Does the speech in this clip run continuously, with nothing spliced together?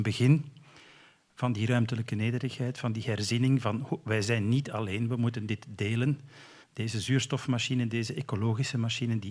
no; 1 cut; at 6.6 s

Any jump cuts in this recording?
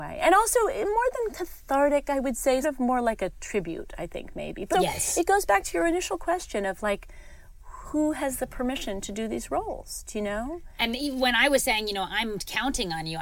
yes; 3 cuts; at 2.6 s, 4.7 s, 7.8 s

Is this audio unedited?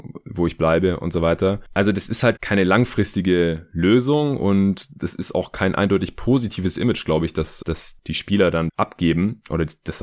no; 3 cuts; at 2.4 s, 7.6 s, 8.7 s

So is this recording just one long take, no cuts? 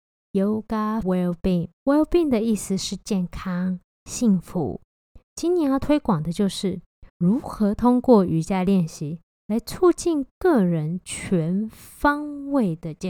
no; 3 cuts; at 1.0 s, 1.8 s, 7.1 s

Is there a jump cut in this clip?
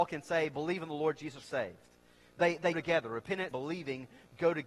yes; 3 cuts; at 1.4 s, 2.7 s, 3.5 s

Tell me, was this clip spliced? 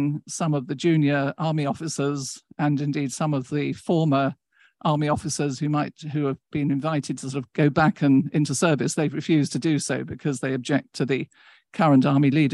no; 0 cuts

